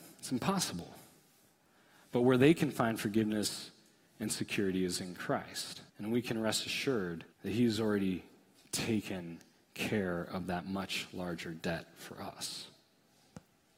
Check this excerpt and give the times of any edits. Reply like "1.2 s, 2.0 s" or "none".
5.9 s, 7.3 s